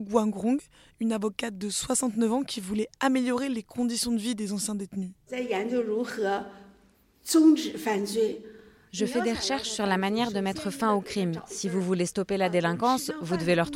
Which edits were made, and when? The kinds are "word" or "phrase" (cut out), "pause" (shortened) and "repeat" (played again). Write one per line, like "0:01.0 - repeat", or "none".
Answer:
none